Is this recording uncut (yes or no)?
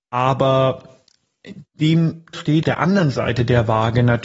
no